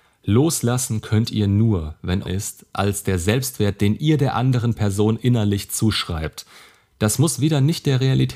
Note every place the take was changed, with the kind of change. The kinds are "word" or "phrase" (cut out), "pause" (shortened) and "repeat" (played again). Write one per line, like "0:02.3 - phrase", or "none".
0:02.2 - phrase